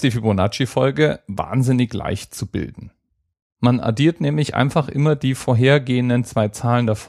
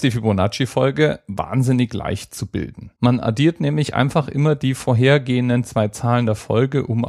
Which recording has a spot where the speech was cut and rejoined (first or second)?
second